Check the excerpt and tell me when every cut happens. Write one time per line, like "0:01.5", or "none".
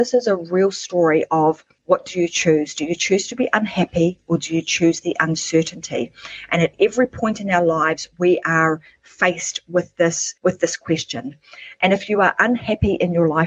0:01.8
0:10.4